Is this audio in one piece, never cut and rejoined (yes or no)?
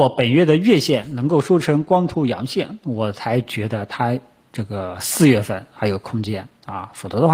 yes